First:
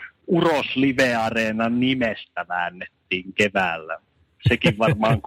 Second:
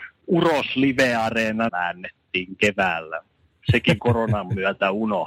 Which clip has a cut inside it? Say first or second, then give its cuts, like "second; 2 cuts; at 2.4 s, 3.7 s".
second; 2 cuts; at 1.7 s, 4.0 s